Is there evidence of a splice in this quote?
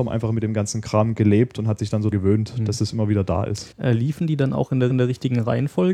yes; 3 cuts; at 2.1 s, 3.7 s, 4.9 s

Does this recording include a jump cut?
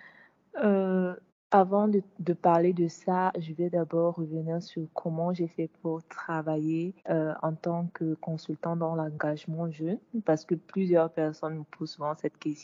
yes; 2 cuts; at 1.3 s, 7.0 s

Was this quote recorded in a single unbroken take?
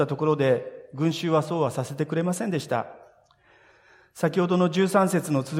yes; 0 cuts

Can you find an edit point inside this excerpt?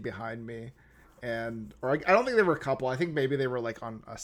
no; 0 cuts

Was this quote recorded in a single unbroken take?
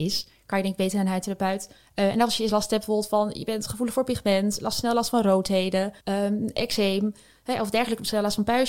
no; 1 cut; at 6.0 s

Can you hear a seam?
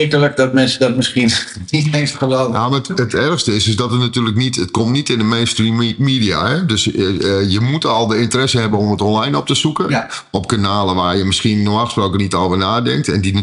no; 0 cuts

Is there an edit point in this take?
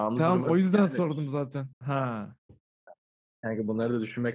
yes; 1 cut; at 1.7 s

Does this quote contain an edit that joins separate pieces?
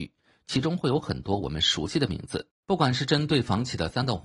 yes; 1 cut; at 2.6 s

